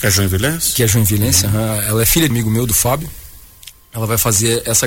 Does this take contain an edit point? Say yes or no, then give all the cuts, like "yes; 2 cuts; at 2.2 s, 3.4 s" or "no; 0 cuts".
yes; 1 cut; at 2.3 s